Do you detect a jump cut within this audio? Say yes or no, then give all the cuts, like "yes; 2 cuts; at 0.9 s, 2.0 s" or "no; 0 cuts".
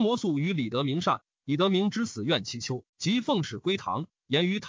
yes; 1 cut; at 2.9 s